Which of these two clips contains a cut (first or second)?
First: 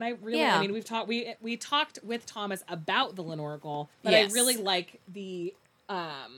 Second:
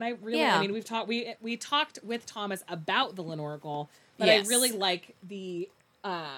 first